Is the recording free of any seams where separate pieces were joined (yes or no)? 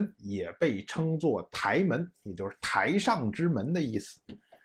yes